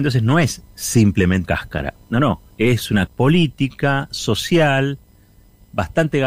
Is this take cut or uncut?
cut